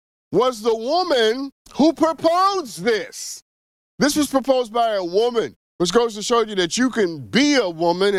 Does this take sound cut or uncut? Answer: cut